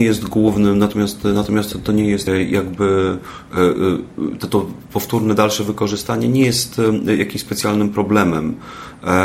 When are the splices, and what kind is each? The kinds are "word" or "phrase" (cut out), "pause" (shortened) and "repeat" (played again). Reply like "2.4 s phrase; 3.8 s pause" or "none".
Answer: 2.3 s word